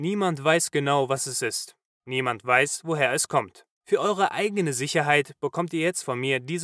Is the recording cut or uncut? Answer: uncut